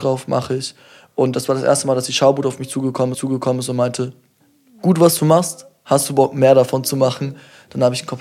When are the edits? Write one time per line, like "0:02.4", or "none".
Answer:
0:03.1